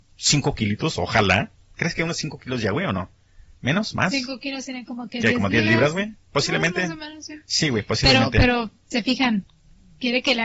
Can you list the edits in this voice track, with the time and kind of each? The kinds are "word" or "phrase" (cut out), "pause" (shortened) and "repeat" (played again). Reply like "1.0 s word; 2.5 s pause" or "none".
none